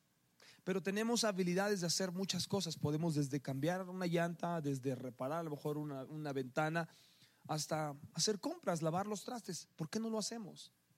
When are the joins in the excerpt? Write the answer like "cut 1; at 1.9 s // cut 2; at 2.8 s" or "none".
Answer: none

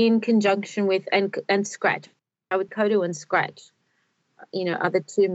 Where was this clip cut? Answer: cut 1; at 2.7 s

